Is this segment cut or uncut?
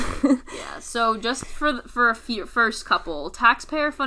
uncut